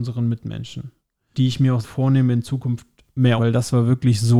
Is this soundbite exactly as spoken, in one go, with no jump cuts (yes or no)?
no